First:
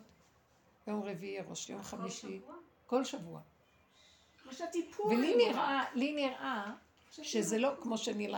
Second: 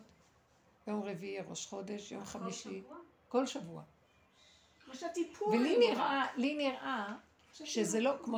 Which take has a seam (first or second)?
first